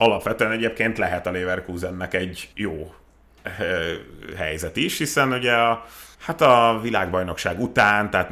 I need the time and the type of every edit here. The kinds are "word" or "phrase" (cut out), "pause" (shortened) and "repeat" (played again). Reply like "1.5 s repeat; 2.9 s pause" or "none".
2.5 s pause; 6.1 s pause